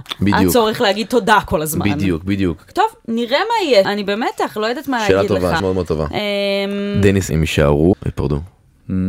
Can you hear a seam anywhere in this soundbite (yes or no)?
yes